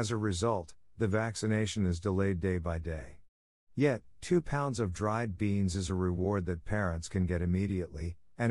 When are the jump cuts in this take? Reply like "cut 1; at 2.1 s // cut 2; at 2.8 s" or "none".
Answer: none